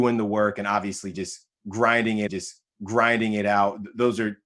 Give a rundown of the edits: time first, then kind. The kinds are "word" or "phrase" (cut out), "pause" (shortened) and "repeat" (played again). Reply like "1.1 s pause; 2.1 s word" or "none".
2.3 s repeat